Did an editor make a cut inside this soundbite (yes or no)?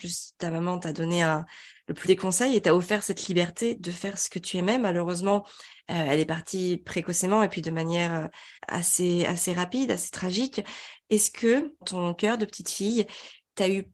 yes